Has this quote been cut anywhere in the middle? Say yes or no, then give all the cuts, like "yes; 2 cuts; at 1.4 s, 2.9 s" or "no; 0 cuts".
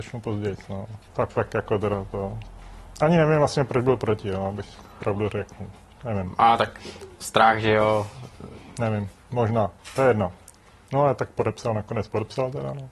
yes; 1 cut; at 1.1 s